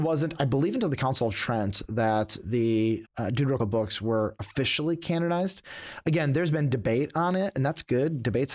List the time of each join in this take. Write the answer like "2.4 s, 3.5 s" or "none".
3.0 s, 3.6 s

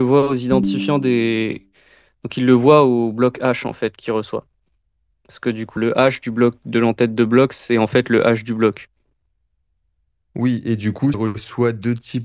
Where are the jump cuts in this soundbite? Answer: 5.8 s, 11.1 s

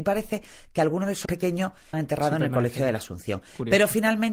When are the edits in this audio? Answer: 1.2 s, 1.9 s

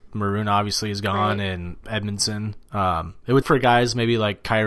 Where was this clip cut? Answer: 3.4 s

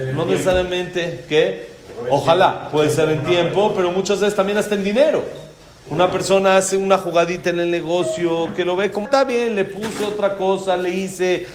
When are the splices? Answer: 9.1 s

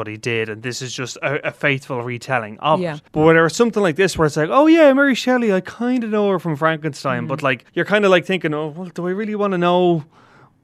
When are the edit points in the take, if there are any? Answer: 3.1 s, 7.7 s

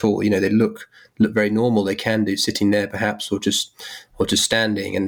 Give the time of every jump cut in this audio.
none

